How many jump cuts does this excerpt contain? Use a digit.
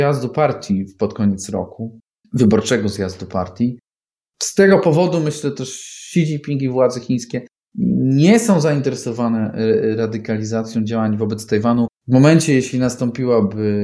1